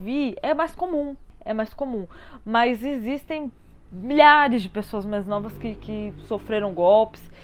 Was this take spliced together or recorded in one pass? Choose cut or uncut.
uncut